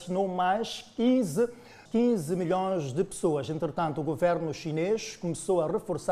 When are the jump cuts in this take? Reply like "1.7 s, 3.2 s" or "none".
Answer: 1.9 s